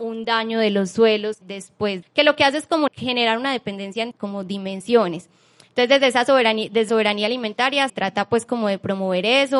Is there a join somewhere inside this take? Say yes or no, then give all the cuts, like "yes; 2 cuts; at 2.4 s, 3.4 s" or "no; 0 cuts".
yes; 6 cuts; at 1.4 s, 2.0 s, 2.9 s, 4.1 s, 6.9 s, 7.9 s